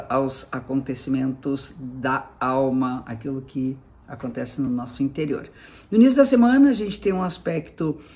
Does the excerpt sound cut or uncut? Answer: uncut